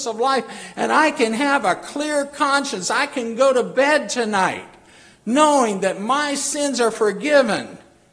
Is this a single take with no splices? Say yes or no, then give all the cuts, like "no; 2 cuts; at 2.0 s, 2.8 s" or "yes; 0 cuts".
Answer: yes; 0 cuts